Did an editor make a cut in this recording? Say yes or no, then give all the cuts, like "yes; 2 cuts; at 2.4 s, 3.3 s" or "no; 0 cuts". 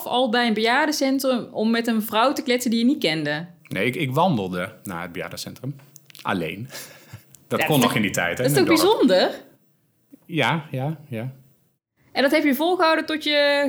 no; 0 cuts